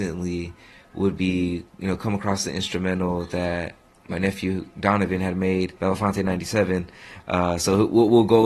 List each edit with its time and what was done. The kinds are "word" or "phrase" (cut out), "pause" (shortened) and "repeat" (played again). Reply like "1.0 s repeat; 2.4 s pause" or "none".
1.7 s pause; 3.9 s pause; 5.8 s pause

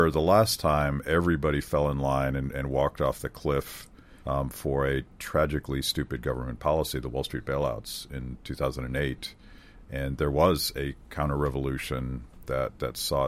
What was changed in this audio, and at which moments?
4.2 s pause

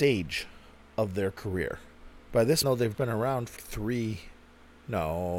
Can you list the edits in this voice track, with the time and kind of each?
2.2 s pause; 2.6 s phrase; 2.9 s word; 3.6 s word

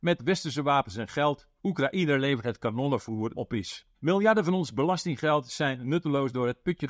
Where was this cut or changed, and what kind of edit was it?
1.6 s pause; 3.3 s phrase; 3.9 s pause

